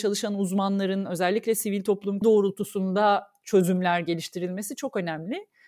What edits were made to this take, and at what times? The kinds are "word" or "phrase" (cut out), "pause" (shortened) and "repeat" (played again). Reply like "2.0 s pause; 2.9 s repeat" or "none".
2.2 s phrase